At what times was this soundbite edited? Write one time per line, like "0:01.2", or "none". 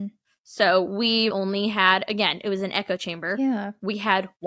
0:01.3